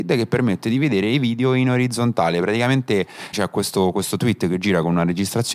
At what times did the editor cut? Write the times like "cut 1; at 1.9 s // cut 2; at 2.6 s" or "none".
cut 1; at 3.3 s